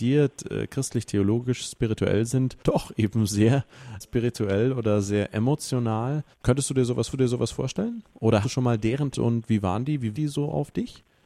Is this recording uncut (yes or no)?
no